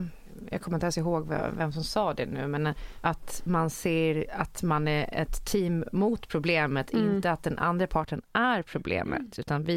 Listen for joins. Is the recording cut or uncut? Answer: uncut